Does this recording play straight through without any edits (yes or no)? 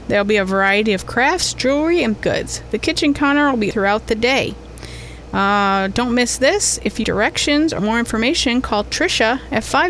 no